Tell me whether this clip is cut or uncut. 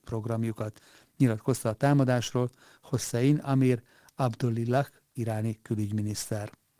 uncut